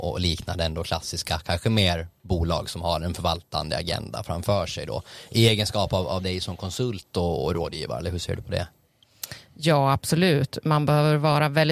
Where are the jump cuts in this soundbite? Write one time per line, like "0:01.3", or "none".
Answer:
none